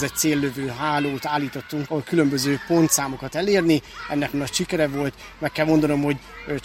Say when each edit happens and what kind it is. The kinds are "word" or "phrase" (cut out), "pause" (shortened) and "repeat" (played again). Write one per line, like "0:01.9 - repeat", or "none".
0:01.9 - word
0:03.3 - word
0:04.3 - word